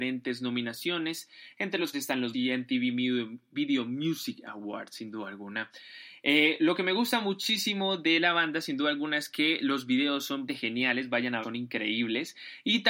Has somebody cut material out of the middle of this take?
yes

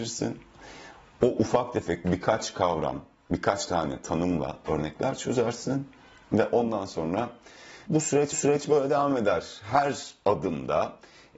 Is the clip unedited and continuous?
no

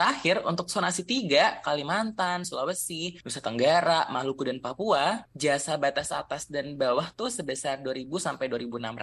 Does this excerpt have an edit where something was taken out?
no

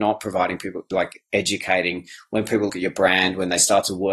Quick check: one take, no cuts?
no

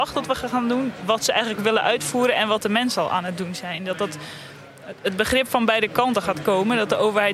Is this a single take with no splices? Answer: yes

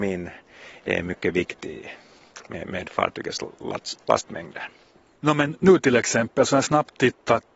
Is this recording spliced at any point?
no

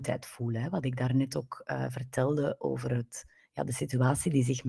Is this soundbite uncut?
yes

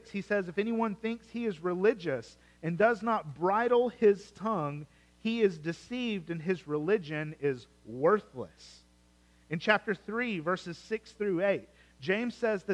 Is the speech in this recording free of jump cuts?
yes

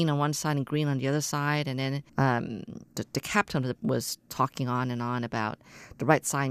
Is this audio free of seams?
no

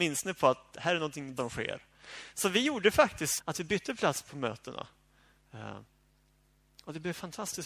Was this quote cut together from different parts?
yes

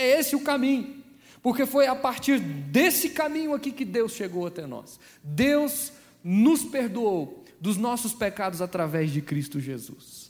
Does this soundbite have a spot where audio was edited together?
no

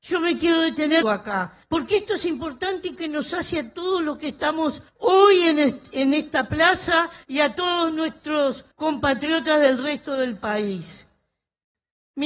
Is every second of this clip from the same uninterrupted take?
no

